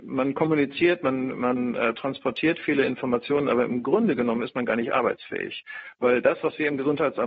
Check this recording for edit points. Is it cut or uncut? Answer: uncut